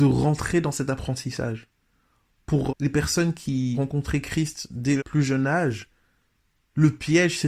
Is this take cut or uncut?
cut